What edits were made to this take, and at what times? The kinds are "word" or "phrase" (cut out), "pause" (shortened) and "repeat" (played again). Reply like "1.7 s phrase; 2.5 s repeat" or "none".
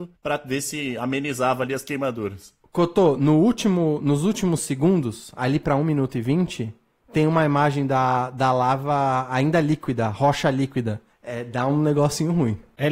none